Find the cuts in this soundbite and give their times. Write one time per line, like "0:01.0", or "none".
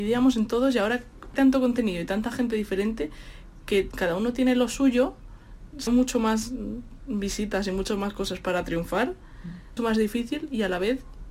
0:01.3
0:05.9
0:09.8